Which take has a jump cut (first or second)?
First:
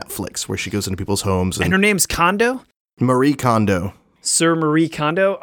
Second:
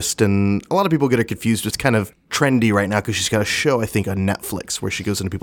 second